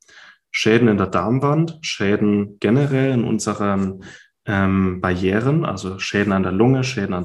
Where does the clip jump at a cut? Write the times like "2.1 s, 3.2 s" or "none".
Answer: none